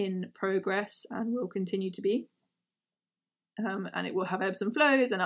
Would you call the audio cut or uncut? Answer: uncut